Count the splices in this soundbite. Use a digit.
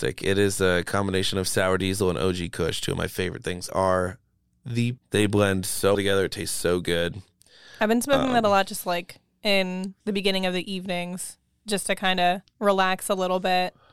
4